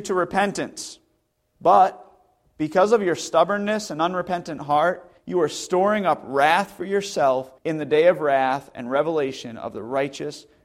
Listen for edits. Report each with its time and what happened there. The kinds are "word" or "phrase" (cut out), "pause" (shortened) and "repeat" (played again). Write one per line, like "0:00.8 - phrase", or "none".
0:01.3 - pause
0:05.2 - pause
0:07.6 - pause